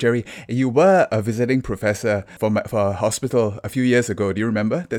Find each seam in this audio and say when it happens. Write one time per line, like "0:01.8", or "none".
none